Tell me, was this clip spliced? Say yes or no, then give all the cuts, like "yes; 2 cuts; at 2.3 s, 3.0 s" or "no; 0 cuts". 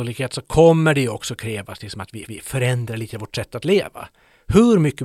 yes; 1 cut; at 2.3 s